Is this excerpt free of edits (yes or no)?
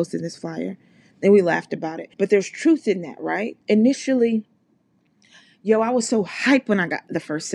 no